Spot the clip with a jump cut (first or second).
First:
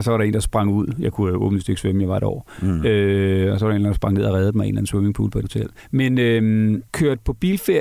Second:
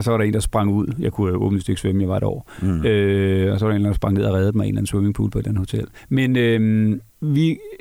first